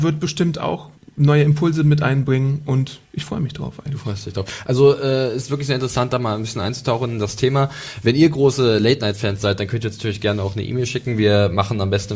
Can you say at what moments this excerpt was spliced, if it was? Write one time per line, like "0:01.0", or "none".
0:01.0
0:03.0